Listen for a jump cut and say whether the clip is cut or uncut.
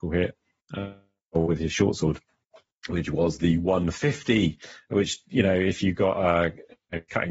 uncut